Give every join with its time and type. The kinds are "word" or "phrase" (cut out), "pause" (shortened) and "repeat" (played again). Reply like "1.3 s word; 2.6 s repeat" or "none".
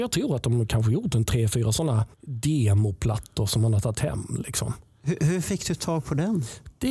2.1 s pause

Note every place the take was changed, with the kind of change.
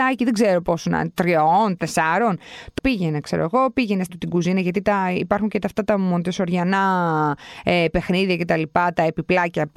1.8 s word; 2.8 s word; 4.1 s word

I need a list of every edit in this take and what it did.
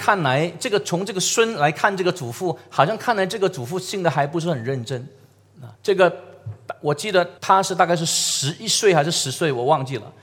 5.8 s pause; 7.4 s pause

